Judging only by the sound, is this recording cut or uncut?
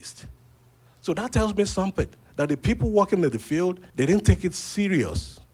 cut